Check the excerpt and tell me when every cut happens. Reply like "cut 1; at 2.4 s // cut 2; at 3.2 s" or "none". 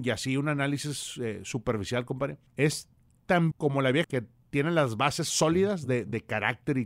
cut 1; at 2.5 s // cut 2; at 3.5 s // cut 3; at 4.0 s